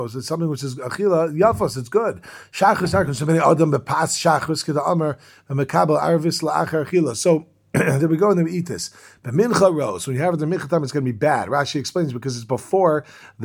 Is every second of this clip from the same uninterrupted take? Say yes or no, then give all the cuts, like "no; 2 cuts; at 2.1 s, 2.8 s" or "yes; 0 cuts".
yes; 0 cuts